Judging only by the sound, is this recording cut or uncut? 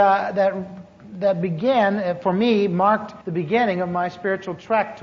cut